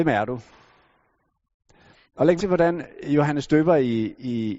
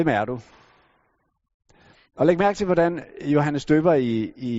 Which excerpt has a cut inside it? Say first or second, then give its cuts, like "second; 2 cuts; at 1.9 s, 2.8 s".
first; 1 cut; at 2.4 s